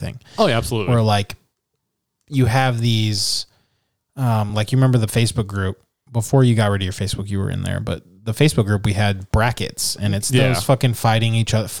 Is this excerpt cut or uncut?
uncut